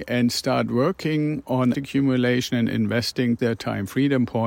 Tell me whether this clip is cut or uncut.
cut